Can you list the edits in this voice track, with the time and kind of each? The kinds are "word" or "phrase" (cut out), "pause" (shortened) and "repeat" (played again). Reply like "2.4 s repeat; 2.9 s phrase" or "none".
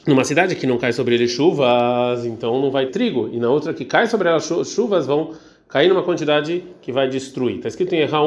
2.9 s word